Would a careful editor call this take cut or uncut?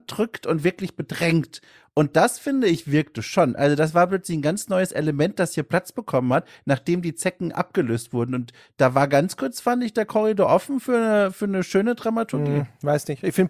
uncut